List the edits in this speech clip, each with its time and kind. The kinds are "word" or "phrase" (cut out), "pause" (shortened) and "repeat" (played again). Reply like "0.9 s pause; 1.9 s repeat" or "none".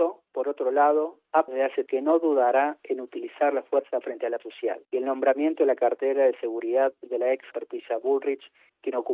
1.5 s word; 1.9 s word; 4.0 s word; 4.4 s word; 4.8 s pause; 7.5 s word